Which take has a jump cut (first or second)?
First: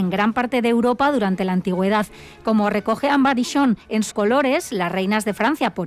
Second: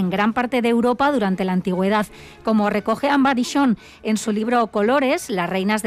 first